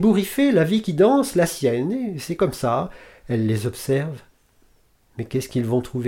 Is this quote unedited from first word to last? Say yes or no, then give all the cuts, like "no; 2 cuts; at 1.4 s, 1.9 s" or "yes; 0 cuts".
yes; 0 cuts